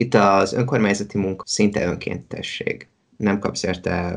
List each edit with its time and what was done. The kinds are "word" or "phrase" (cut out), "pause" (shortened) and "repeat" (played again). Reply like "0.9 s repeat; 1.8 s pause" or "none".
1.4 s word